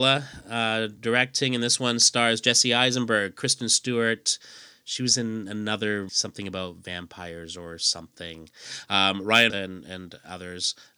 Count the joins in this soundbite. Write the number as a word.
two